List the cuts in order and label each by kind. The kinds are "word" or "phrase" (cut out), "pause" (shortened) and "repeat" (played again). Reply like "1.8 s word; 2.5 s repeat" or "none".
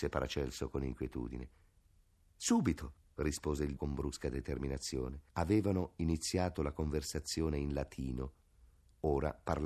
3.0 s pause; 3.8 s word; 5.3 s pause